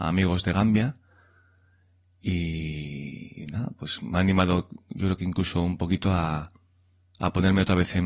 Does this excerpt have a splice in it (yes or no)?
no